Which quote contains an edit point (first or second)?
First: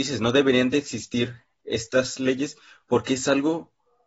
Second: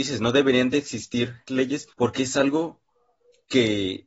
second